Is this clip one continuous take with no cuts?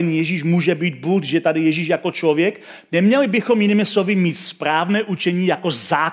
yes; 0 cuts

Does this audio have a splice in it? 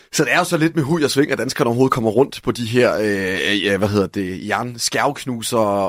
no; 0 cuts

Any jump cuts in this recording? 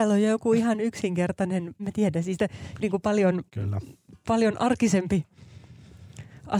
yes; 3 cuts; at 1.8 s, 2.8 s, 3.5 s

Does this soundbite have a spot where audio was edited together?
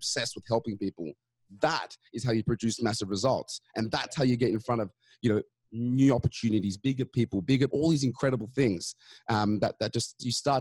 yes; 1 cut; at 7.7 s

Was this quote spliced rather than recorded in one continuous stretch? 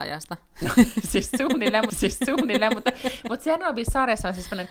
yes; 1 cut; at 1.9 s

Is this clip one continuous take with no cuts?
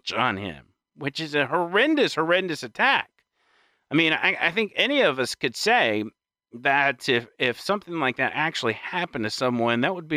yes; 0 cuts

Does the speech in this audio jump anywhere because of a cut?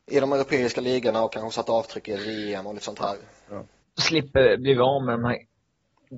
no; 0 cuts

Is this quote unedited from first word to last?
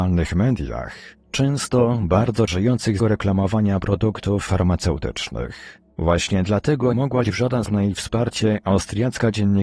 no; 6 cuts; at 2.5 s, 3.0 s, 4.5 s, 6.9 s, 7.2 s, 7.7 s

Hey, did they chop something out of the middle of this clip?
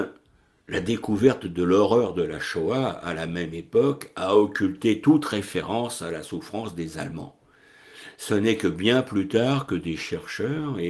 no; 0 cuts

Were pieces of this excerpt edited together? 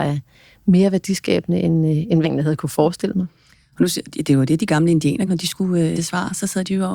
yes; 3 cuts; at 2.2 s, 5.3 s, 6.0 s

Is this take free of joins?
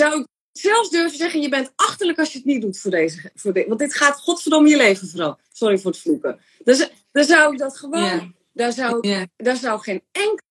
yes; 0 cuts

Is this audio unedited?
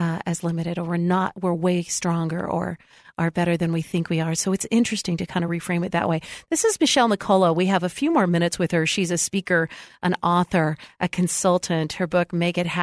yes; 0 cuts

